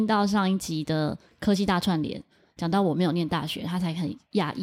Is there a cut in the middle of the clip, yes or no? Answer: no